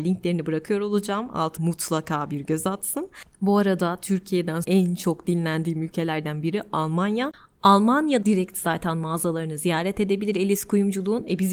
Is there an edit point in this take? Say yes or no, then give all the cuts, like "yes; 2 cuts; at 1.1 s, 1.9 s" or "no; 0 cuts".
yes; 3 cuts; at 1.6 s, 4.6 s, 8.2 s